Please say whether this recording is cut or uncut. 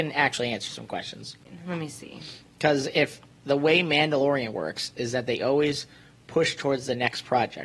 uncut